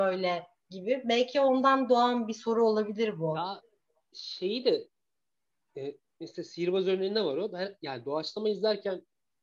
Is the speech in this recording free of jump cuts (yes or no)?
yes